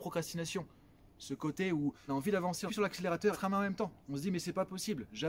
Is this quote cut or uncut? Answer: cut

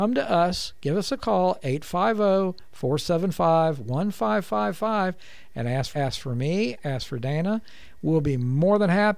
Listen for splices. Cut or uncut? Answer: cut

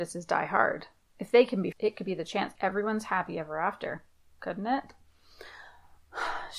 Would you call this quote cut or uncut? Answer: cut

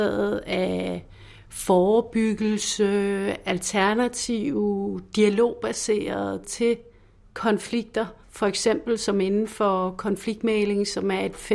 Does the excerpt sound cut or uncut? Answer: cut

